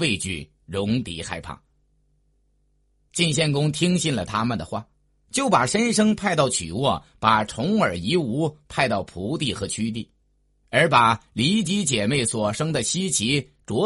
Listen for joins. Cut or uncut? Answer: uncut